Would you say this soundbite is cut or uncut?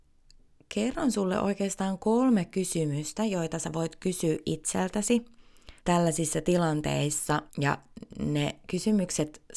cut